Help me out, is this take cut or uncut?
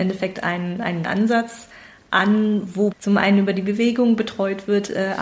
cut